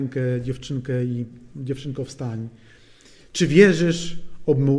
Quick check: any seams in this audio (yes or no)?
no